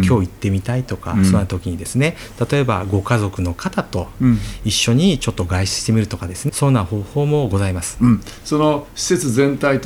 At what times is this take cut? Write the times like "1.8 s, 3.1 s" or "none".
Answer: 6.5 s